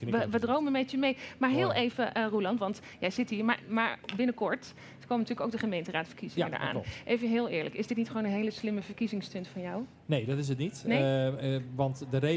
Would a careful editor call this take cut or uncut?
uncut